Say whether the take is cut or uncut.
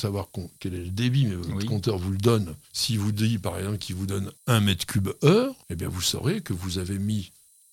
cut